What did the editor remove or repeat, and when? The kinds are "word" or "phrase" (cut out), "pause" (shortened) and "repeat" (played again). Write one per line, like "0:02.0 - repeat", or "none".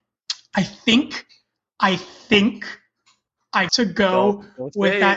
0:03.7 - word